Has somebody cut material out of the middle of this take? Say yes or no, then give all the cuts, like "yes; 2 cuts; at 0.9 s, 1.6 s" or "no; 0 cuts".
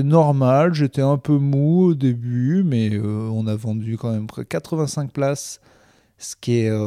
no; 0 cuts